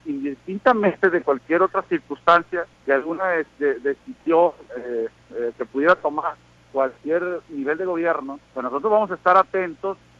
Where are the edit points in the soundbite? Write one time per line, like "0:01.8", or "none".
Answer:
0:02.7
0:05.2
0:06.6
0:08.4